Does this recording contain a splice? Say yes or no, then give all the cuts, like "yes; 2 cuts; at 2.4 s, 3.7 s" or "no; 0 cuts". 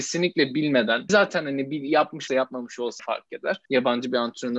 yes; 4 cuts; at 1.1 s, 2.3 s, 3.0 s, 3.7 s